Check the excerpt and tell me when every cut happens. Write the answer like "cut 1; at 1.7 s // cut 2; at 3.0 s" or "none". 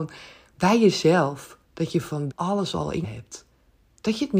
cut 1; at 1.6 s // cut 2; at 2.3 s // cut 3; at 3.0 s